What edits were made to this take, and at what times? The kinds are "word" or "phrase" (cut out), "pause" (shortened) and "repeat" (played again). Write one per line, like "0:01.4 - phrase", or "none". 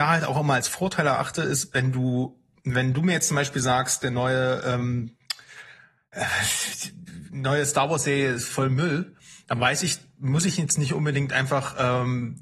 none